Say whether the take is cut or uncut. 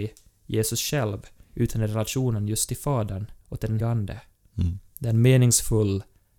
cut